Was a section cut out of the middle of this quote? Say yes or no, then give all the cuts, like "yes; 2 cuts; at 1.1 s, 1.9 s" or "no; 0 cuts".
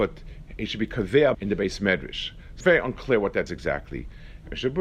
yes; 3 cuts; at 1.3 s, 2.6 s, 3.5 s